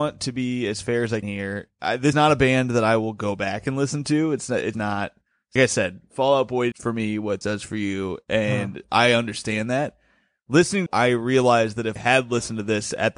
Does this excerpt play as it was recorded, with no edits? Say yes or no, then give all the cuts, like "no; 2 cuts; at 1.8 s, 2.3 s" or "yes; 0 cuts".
no; 8 cuts; at 1.2 s, 2.1 s, 4.7 s, 5.6 s, 6.7 s, 7.4 s, 10.9 s, 12.0 s